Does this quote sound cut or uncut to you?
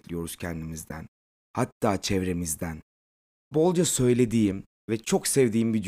cut